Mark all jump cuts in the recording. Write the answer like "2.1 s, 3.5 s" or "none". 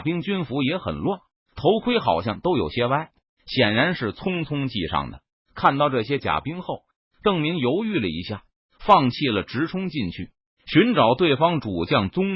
none

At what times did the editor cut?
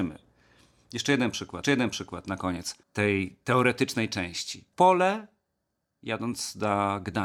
1.6 s, 2.8 s, 4.7 s

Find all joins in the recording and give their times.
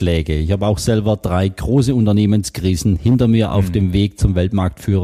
none

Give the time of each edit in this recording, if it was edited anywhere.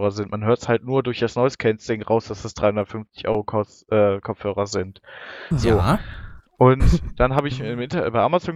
6.5 s

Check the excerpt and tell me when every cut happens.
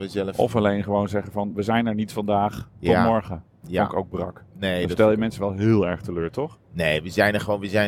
none

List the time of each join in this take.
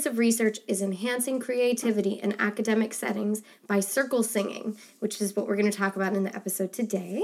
none

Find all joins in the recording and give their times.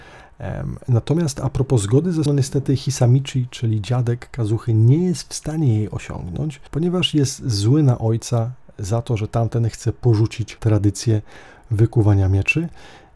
2.3 s, 6.7 s, 10.6 s

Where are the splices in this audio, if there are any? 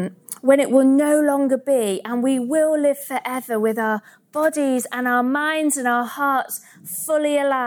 none

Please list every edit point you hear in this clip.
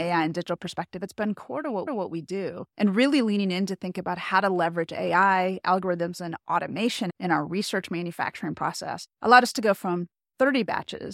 1.9 s, 2.7 s, 9.1 s

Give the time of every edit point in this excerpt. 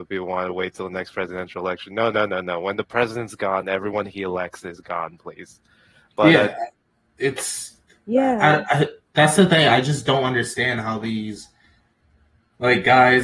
none

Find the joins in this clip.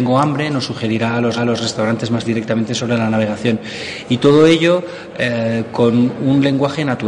1.4 s, 2.3 s

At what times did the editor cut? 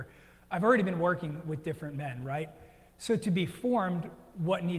none

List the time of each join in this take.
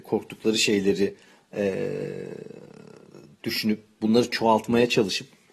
none

